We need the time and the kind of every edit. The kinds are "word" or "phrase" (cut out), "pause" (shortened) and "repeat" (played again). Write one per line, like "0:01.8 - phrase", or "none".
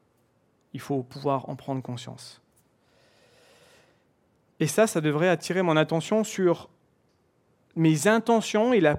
none